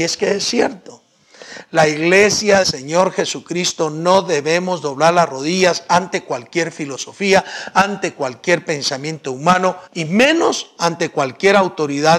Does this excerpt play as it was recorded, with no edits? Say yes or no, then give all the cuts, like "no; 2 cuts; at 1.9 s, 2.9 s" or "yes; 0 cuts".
no; 2 cuts; at 2.6 s, 9.9 s